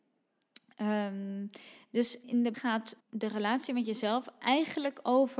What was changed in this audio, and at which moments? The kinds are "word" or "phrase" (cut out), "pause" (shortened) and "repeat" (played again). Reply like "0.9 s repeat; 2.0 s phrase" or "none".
2.2 s word; 2.5 s word; 3.0 s pause